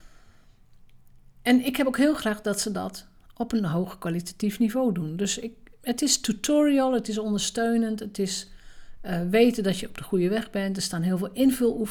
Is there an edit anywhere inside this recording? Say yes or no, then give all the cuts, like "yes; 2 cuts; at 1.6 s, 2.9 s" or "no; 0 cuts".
no; 0 cuts